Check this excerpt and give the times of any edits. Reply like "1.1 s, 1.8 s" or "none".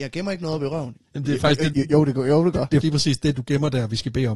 1.0 s, 1.7 s, 2.8 s